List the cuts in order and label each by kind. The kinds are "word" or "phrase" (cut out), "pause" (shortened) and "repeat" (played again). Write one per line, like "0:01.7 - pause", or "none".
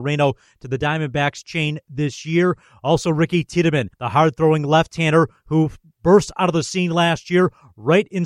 0:03.9 - pause